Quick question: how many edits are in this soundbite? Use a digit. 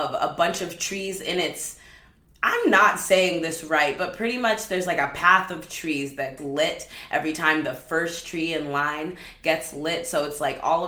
1